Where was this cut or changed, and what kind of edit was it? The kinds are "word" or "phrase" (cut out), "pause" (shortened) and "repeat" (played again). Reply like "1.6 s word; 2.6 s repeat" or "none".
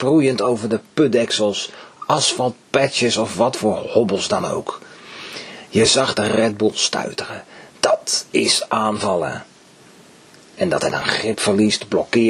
none